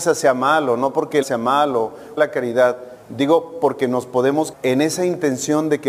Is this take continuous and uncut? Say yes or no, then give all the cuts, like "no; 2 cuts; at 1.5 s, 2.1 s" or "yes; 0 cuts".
no; 4 cuts; at 1.2 s, 2.2 s, 3.0 s, 4.5 s